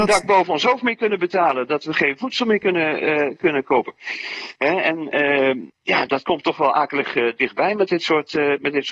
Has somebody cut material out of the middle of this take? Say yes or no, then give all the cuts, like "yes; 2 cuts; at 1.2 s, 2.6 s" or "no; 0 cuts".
yes; 1 cut; at 5.7 s